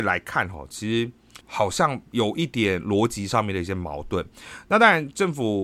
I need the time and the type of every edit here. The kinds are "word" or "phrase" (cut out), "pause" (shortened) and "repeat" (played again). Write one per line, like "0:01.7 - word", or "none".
0:01.4 - pause
0:02.1 - pause